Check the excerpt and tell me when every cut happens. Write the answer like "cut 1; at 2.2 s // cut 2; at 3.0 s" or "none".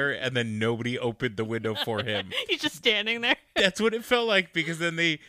none